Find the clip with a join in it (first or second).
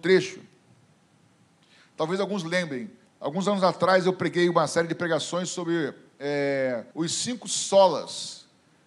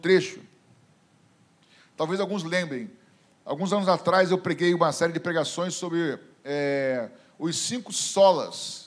first